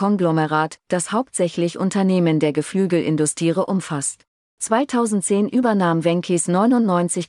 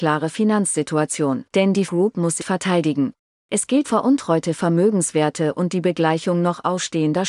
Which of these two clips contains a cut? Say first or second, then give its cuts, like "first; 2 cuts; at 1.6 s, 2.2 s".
second; 4 cuts; at 1.5 s, 1.9 s, 2.4 s, 3.8 s